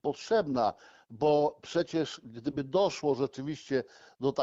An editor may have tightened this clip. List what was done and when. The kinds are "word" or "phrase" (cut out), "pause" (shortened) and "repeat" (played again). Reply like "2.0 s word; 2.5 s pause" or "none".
none